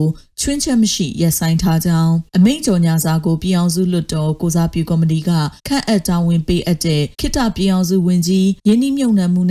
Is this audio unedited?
no; 4 cuts; at 2.3 s, 5.6 s, 7.1 s, 8.6 s

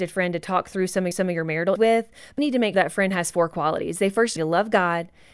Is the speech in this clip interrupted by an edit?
yes; 5 cuts; at 1.1 s, 1.7 s, 2.4 s, 2.7 s, 4.4 s

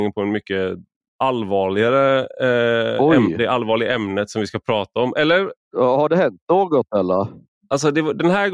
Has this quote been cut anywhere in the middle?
no; 0 cuts

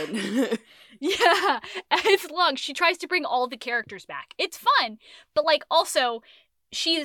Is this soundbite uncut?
yes; 0 cuts

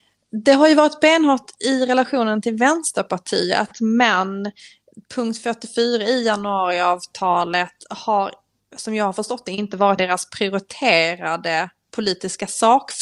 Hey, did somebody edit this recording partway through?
yes; 2 cuts; at 5.0 s, 10.0 s

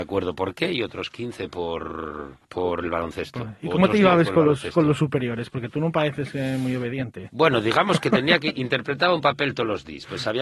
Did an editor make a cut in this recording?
yes; 1 cut; at 2.4 s

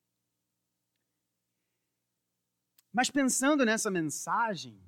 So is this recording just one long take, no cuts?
yes; 0 cuts

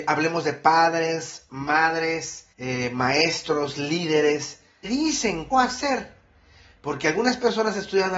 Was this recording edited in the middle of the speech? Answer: yes; 3 cuts; at 2.5 s, 4.8 s, 5.5 s

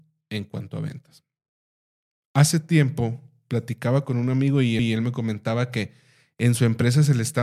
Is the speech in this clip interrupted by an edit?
yes; 1 cut; at 4.8 s

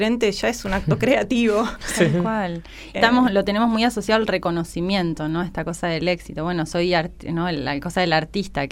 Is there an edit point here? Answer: yes; 1 cut; at 2.9 s

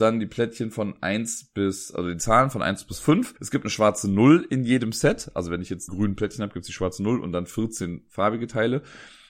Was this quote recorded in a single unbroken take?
no; 2 cuts; at 3.4 s, 5.9 s

